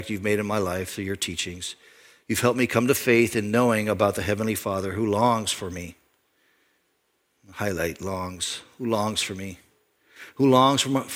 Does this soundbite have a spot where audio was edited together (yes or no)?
no